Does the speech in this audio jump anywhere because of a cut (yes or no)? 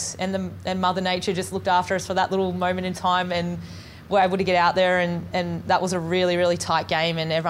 no